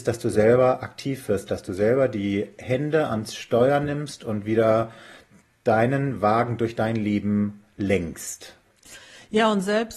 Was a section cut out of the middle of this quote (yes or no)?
no